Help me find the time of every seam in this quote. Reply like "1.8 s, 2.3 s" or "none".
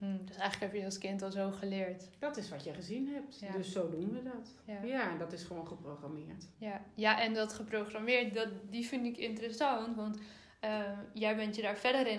6.5 s